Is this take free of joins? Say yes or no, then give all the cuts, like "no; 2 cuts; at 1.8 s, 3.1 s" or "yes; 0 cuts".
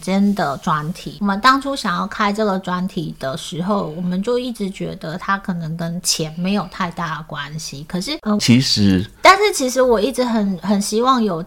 no; 1 cut; at 8.4 s